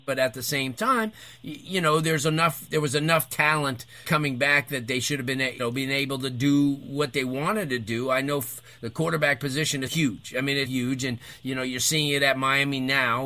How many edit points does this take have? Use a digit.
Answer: 4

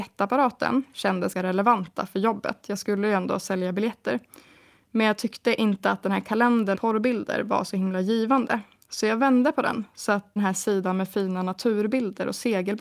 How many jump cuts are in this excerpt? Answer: 3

